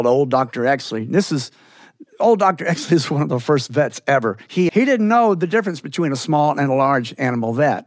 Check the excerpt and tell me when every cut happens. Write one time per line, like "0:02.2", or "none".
0:04.7